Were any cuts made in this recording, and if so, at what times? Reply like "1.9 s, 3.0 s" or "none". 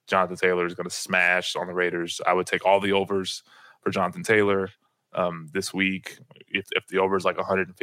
6.6 s